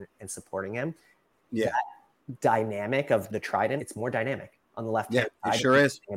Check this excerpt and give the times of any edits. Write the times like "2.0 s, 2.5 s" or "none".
3.3 s, 3.8 s, 4.7 s